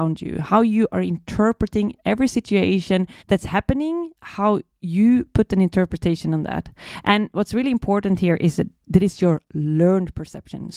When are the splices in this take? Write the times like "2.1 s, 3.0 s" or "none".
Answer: 3.2 s